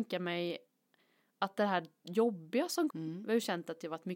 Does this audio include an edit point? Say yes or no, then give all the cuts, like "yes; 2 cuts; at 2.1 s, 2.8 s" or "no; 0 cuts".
yes; 1 cut; at 2.9 s